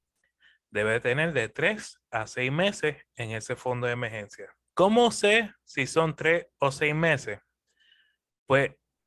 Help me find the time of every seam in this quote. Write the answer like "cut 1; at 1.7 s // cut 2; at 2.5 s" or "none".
cut 1; at 4.7 s